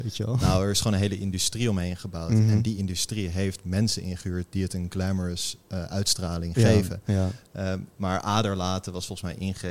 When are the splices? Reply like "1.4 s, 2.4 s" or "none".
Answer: none